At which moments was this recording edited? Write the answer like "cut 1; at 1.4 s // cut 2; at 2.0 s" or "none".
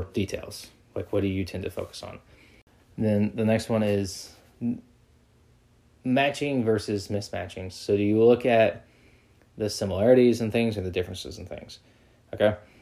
none